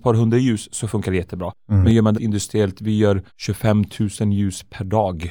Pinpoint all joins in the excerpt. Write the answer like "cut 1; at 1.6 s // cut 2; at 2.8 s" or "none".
cut 1; at 2.1 s // cut 2; at 3.3 s